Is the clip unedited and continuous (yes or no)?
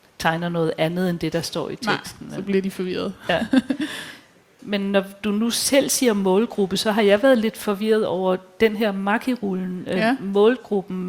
yes